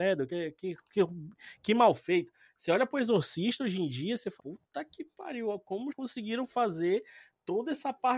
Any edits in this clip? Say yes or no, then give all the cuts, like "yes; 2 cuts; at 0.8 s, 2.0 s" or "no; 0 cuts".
yes; 2 cuts; at 4.4 s, 5.9 s